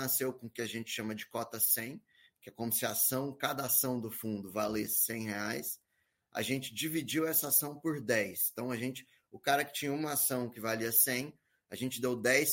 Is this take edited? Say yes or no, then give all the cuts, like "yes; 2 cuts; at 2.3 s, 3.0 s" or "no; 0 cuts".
no; 0 cuts